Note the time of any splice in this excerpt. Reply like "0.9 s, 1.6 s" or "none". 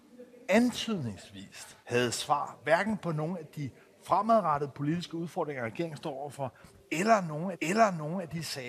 1.8 s, 7.5 s